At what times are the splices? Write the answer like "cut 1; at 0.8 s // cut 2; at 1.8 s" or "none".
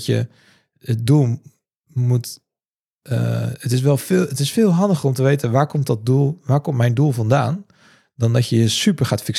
none